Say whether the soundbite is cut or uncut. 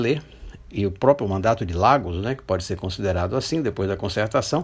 uncut